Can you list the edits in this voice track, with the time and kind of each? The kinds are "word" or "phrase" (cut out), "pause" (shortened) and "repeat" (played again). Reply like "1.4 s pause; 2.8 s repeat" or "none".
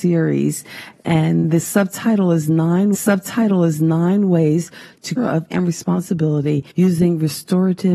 2.9 s repeat; 5.2 s phrase; 5.5 s word; 6.7 s pause